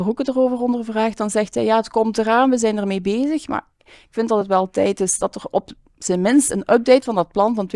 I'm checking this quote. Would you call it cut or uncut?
uncut